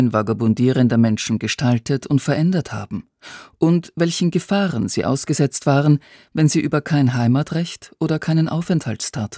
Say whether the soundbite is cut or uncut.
uncut